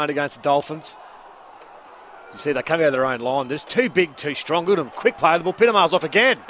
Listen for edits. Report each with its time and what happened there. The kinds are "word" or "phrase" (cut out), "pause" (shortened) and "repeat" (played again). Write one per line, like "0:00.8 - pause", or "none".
none

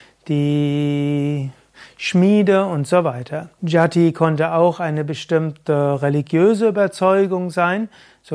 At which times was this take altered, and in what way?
0:03.6 - pause

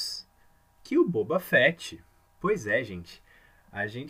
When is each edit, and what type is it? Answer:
none

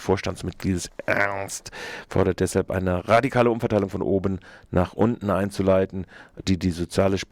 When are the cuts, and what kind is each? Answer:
none

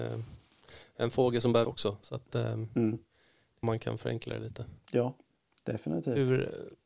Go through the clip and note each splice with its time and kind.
0:01.6 - word
0:03.6 - phrase
0:05.3 - pause

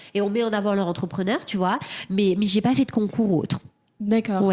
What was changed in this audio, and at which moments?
none

